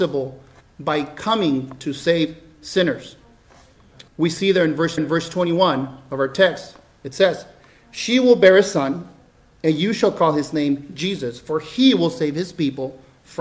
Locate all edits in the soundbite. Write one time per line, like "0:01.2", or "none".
0:04.1
0:05.0